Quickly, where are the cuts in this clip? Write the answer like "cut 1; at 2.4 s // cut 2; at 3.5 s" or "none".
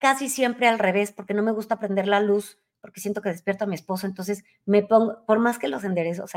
none